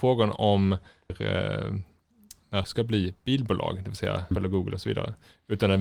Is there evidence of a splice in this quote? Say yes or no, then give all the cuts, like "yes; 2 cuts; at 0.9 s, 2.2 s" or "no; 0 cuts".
yes; 3 cuts; at 1.1 s, 2.6 s, 4.3 s